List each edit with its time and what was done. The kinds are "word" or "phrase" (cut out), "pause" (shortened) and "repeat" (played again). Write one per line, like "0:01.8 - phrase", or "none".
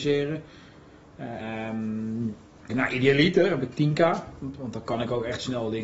0:01.4 - word
0:02.7 - word
0:04.6 - word